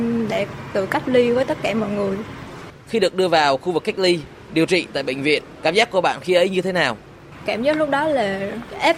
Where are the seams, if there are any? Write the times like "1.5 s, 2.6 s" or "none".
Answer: none